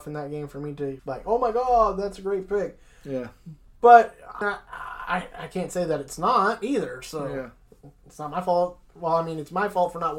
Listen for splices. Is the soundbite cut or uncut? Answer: cut